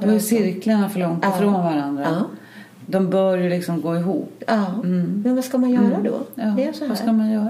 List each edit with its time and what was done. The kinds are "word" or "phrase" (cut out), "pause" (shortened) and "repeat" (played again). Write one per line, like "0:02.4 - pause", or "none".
none